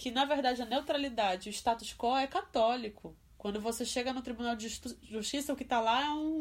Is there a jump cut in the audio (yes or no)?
no